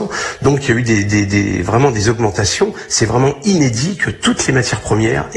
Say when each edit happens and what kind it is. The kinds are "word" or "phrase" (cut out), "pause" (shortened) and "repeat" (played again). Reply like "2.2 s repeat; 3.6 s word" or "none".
none